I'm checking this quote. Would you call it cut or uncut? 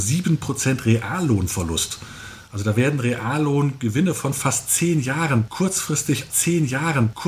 cut